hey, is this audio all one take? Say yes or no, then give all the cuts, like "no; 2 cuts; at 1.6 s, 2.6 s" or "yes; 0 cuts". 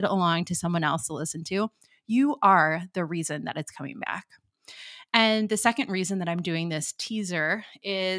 yes; 0 cuts